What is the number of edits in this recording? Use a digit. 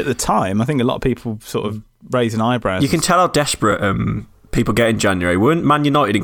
0